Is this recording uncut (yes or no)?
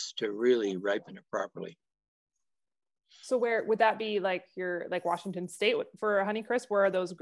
yes